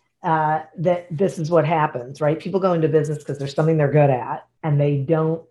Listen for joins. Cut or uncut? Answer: uncut